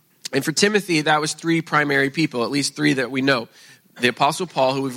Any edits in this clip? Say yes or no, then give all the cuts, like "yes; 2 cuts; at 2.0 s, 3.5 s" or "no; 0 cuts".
no; 0 cuts